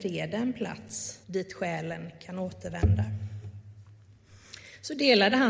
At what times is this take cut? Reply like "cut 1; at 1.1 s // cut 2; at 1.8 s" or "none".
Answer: cut 1; at 1.2 s